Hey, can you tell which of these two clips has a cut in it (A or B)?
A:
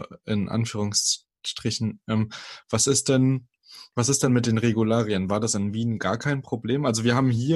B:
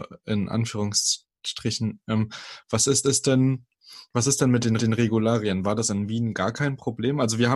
B